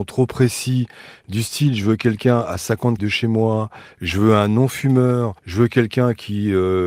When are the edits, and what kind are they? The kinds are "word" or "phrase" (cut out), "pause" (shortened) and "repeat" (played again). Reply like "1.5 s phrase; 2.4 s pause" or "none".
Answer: 3.0 s word; 5.4 s pause